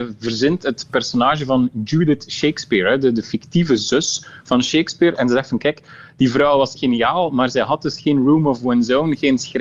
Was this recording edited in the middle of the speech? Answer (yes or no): yes